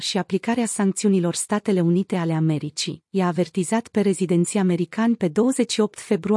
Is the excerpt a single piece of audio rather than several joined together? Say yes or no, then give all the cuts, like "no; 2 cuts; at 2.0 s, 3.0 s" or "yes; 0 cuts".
yes; 0 cuts